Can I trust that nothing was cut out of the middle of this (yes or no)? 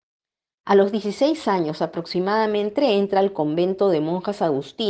yes